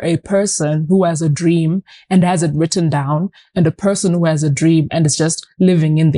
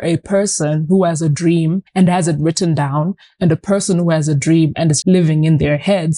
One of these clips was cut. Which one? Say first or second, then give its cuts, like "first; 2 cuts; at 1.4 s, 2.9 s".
second; 2 cuts; at 1.9 s, 5.0 s